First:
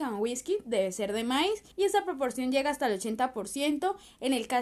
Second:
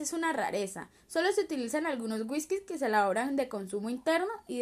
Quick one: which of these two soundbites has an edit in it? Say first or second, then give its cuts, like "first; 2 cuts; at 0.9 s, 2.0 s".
first; 1 cut; at 1.7 s